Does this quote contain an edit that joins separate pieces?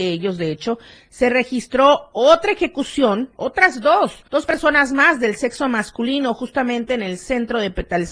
yes; 1 cut; at 4.3 s

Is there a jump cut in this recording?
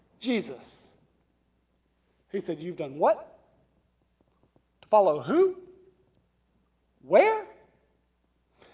no; 0 cuts

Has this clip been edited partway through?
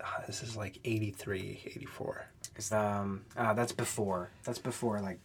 yes; 2 cuts; at 2.7 s, 3.3 s

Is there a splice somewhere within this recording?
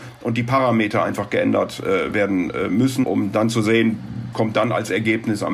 yes; 2 cuts; at 3.0 s, 4.3 s

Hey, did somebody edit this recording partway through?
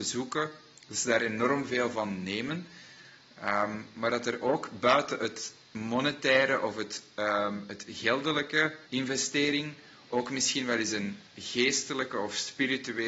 yes; 2 cuts; at 8.9 s, 11.3 s

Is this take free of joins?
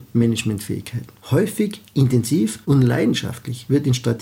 no; 2 cuts; at 1.2 s, 2.6 s

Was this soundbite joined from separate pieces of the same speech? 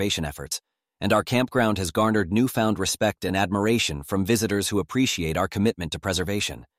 no; 0 cuts

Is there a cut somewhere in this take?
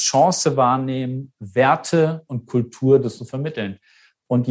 yes; 1 cut; at 3.2 s

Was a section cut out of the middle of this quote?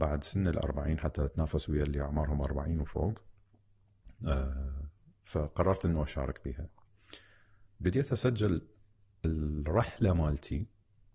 no; 0 cuts

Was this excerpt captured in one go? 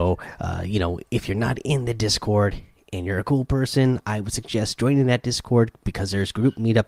yes; 0 cuts

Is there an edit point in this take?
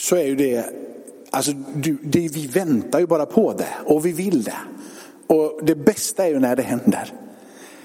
no; 0 cuts

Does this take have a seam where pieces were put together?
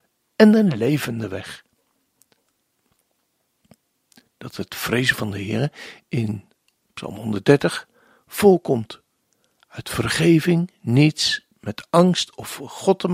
no; 0 cuts

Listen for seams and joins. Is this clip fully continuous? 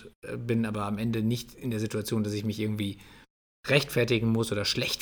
yes; 0 cuts

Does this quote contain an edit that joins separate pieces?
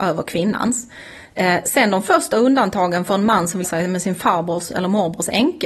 yes; 1 cut; at 3.6 s

